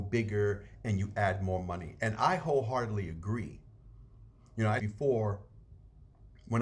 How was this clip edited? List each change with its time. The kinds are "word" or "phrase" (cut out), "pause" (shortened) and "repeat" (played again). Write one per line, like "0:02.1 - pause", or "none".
0:04.8 - word